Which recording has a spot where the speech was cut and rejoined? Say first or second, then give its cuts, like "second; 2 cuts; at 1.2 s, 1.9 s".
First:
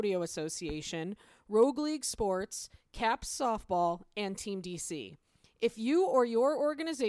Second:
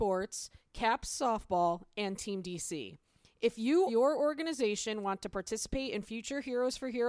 second; 1 cut; at 3.9 s